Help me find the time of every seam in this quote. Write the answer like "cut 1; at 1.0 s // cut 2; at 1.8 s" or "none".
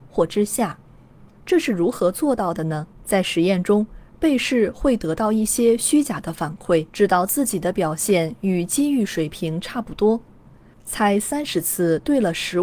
cut 1; at 1.3 s // cut 2; at 2.9 s // cut 3; at 6.9 s